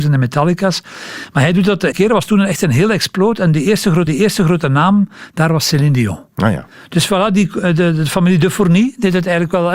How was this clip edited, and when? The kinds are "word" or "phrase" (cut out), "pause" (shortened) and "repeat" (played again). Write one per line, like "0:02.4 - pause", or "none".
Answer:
0:01.9 - word
0:04.1 - repeat